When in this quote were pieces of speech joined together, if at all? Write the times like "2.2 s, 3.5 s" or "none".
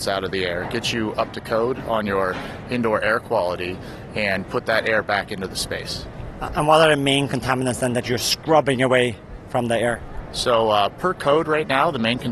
4.4 s